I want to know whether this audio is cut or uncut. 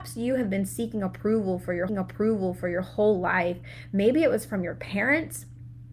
cut